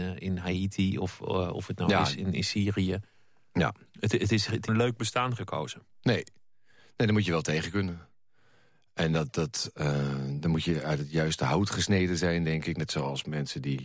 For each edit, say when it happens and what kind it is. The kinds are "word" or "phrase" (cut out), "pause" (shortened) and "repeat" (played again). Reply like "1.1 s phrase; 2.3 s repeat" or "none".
4.7 s phrase